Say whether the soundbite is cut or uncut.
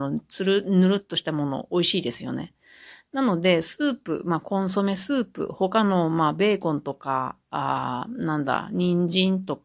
uncut